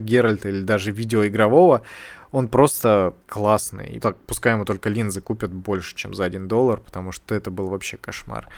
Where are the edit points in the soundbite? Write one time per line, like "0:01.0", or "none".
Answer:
0:03.2
0:04.0